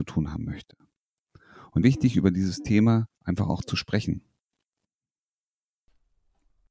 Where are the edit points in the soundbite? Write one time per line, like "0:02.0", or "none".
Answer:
0:01.8
0:03.1